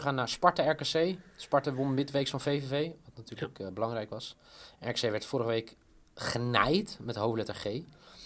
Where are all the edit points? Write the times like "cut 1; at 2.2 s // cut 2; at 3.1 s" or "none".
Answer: none